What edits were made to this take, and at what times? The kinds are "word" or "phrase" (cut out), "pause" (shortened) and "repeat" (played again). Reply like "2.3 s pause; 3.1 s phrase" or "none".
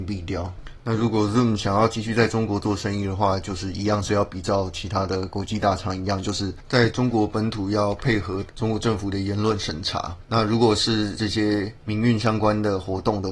none